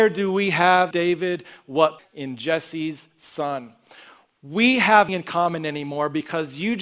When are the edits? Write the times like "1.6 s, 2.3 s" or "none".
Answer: 0.9 s, 2.0 s, 5.1 s